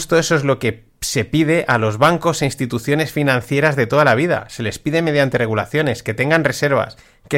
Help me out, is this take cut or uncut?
cut